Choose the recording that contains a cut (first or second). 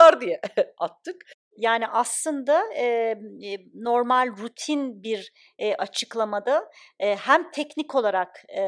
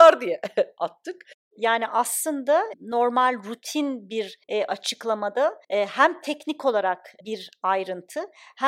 second